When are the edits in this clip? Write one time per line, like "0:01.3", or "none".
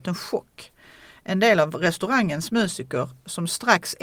none